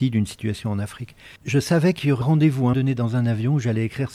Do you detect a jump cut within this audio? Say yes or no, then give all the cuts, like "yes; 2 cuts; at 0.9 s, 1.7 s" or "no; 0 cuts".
yes; 3 cuts; at 1.4 s, 2.2 s, 2.7 s